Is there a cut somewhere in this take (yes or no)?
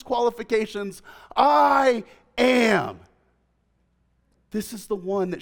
no